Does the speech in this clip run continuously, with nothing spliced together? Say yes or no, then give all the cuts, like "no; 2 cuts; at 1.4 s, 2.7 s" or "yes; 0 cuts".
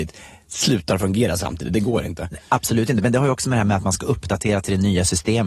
yes; 0 cuts